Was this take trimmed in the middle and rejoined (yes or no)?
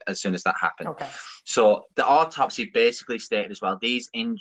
yes